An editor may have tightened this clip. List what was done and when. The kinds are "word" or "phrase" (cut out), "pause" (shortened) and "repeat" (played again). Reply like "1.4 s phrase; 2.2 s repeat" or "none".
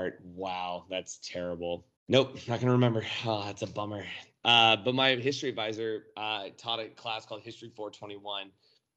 2.0 s pause

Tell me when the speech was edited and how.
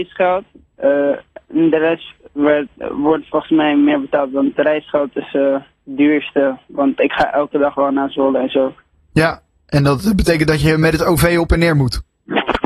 none

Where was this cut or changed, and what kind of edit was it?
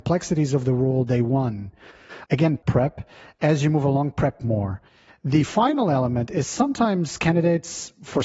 none

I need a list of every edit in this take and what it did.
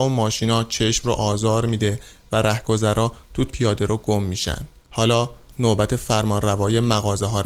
3.5 s phrase; 4.8 s pause

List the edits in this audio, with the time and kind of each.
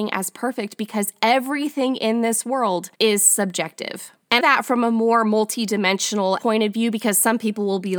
2.9 s pause; 4.4 s phrase; 6.4 s word

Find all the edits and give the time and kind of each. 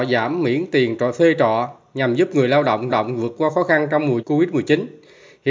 2.9 s repeat; 4.2 s word

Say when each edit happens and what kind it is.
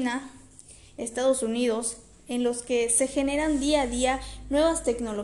none

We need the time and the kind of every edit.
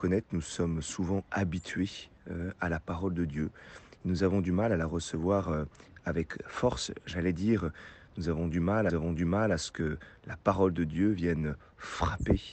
8.9 s repeat

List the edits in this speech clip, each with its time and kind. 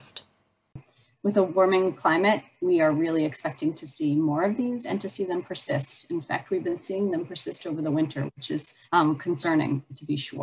8.8 s pause

